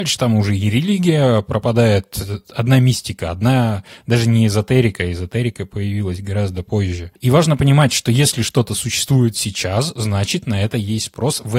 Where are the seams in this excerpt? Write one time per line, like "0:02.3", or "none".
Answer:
none